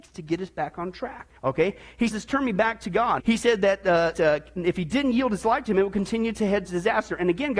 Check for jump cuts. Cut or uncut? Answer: cut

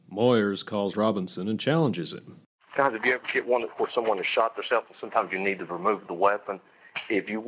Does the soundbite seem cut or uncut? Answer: uncut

